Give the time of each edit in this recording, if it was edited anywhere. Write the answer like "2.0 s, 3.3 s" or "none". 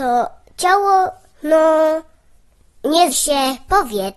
3.1 s